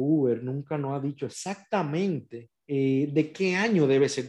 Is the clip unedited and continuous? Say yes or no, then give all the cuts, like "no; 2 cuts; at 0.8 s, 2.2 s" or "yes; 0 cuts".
no; 1 cut; at 2.6 s